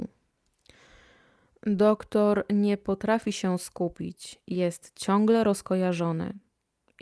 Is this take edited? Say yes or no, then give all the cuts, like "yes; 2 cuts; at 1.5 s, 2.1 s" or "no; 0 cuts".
no; 0 cuts